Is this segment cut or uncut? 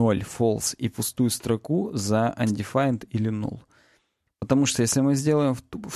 uncut